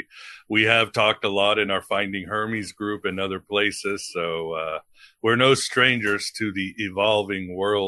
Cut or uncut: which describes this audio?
uncut